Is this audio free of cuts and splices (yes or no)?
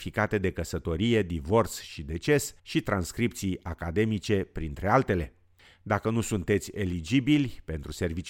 no